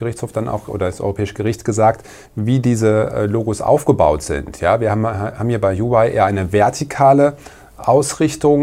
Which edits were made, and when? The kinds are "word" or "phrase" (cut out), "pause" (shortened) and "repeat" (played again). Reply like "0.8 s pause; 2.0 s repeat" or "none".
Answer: 2.3 s word